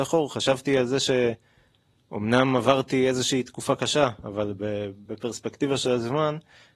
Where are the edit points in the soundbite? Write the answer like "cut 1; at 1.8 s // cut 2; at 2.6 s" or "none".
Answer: none